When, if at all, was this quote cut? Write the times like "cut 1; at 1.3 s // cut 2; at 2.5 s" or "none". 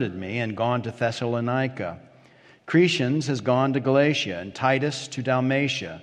none